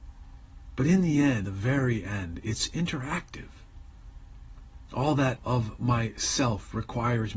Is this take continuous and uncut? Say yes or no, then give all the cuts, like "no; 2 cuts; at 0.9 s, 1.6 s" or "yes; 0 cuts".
no; 2 cuts; at 1.4 s, 5.4 s